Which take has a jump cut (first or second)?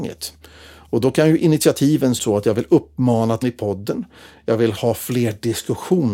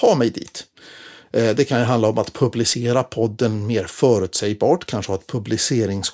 first